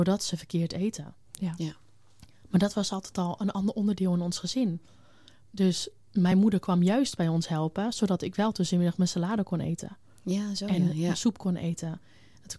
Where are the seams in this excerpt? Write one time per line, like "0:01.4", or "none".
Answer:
none